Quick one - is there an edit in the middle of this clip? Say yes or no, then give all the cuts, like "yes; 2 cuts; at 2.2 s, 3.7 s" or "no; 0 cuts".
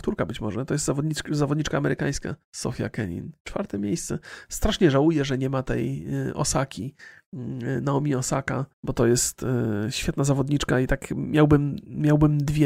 yes; 2 cuts; at 2.4 s, 8.7 s